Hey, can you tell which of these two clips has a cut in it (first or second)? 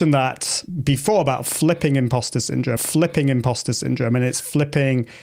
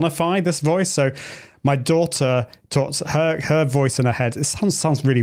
first